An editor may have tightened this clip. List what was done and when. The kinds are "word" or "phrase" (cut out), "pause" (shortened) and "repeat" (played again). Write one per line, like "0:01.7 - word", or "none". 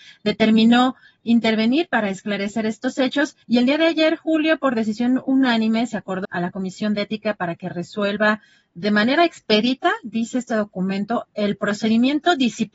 0:03.4 - pause
0:06.2 - word

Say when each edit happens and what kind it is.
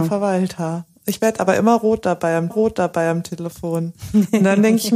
0:01.0 - pause
0:02.5 - repeat

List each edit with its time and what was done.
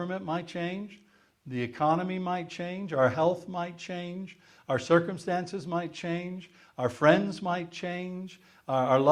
none

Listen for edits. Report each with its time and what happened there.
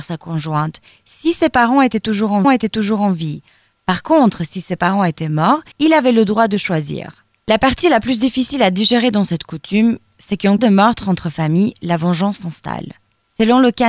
0:02.4 - repeat
0:05.7 - pause
0:10.6 - word

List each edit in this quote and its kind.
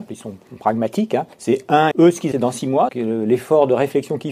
0:01.3 - pause
0:01.9 - word
0:02.3 - word
0:02.9 - word

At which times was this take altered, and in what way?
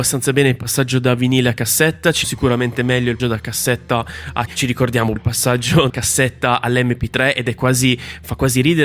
0:02.2 - word
0:03.2 - word
0:04.5 - word
0:05.2 - word
0:05.9 - word

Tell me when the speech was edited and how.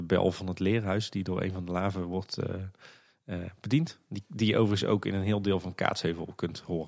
none

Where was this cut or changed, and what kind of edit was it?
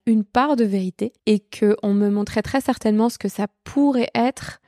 0:01.2 - pause

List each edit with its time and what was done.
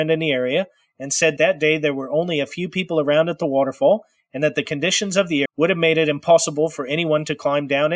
0:01.4 - word
0:05.5 - word

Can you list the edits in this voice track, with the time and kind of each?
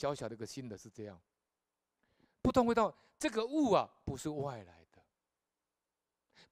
none

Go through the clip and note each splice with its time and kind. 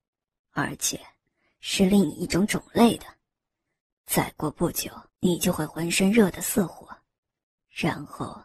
0:05.1 - pause

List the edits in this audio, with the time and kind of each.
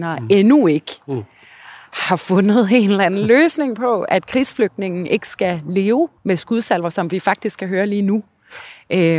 0:06.2 - pause

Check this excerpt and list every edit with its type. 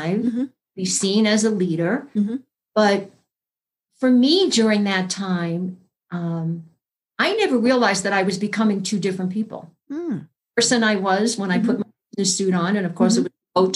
none

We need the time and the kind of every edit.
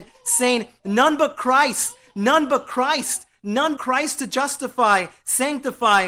0:03.8 - word

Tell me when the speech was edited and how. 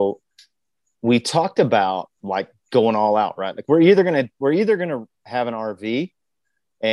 0:02.2 - pause

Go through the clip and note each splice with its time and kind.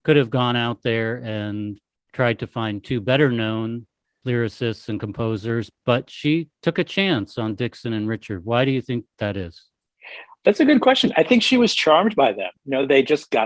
none

